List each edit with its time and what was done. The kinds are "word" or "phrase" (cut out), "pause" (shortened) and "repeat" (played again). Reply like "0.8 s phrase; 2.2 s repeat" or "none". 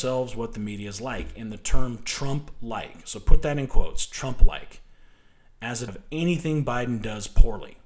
5.9 s word